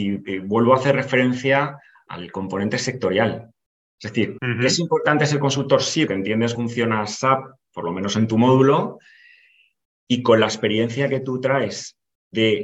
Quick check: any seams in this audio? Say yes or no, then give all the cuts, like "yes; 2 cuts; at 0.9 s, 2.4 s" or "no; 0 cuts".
yes; 4 cuts; at 2.1 s, 4.4 s, 6.1 s, 6.6 s